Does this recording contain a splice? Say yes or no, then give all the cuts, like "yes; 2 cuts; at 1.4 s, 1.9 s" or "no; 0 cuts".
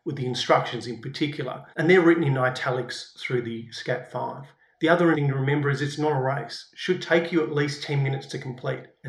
yes; 3 cuts; at 1.7 s, 4.6 s, 5.1 s